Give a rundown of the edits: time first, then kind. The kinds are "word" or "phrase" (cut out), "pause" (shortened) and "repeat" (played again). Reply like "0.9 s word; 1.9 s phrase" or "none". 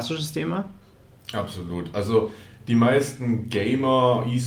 none